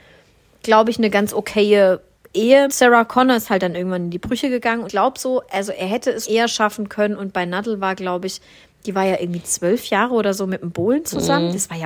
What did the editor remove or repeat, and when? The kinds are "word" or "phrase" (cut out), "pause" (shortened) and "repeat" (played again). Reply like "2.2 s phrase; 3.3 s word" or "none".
2.7 s word; 4.9 s word; 6.2 s word